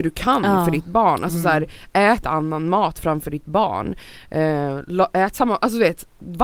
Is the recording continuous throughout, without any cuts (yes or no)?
no